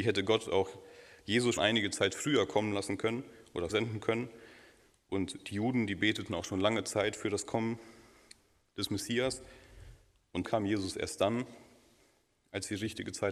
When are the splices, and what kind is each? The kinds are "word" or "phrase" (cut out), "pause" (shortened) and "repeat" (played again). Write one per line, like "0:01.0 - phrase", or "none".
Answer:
0:01.6 - word
0:03.7 - word
0:10.4 - word